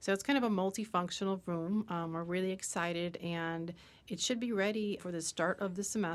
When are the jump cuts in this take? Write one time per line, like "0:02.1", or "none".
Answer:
0:05.0